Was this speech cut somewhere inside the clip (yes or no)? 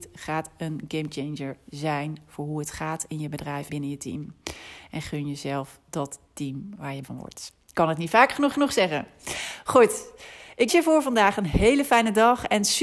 yes